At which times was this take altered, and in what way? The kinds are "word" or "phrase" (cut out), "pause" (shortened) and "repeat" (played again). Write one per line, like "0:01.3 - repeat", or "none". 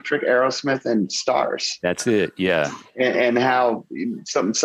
0:03.1 - word

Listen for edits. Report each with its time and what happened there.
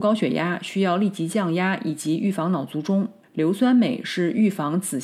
0:03.2 - pause

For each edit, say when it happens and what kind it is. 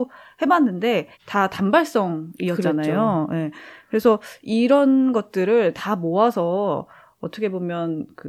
0:01.1 - pause

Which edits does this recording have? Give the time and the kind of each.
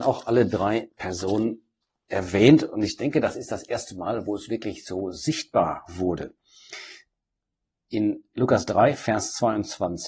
0:01.8 - pause

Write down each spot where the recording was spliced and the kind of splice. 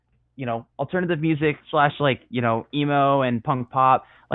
0:01.6 - pause

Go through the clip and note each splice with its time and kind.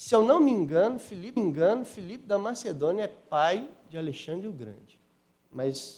0:01.4 - repeat

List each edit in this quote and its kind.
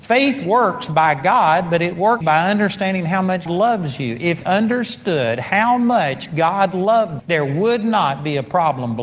0:02.2 - word
0:03.5 - word
0:04.4 - phrase
0:07.2 - word

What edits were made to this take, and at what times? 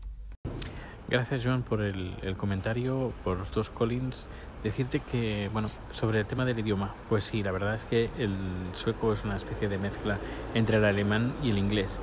none

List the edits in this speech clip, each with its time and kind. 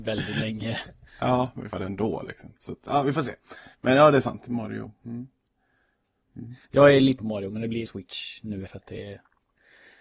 0:01.1 - pause
0:01.7 - phrase
0:02.6 - pause
0:03.7 - pause
0:06.6 - pause
0:07.2 - word
0:07.8 - word
0:08.7 - word

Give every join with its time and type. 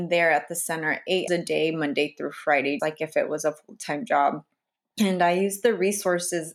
0:01.3 - word
0:02.8 - word

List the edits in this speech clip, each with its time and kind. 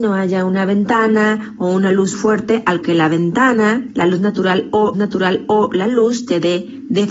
0:02.1 - word
0:02.8 - word
0:04.9 - repeat

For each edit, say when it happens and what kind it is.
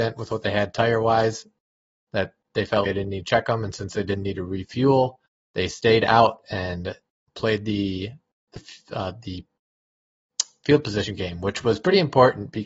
0:02.8 - word

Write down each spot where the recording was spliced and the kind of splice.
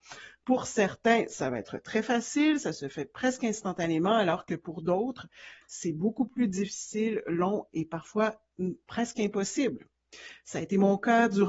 none

